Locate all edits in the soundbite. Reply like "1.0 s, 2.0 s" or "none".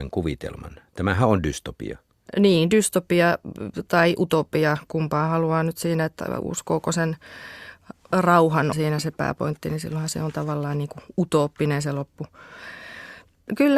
8.7 s